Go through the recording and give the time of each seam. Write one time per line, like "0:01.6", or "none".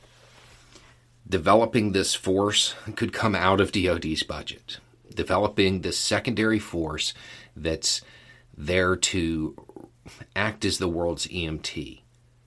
0:04.9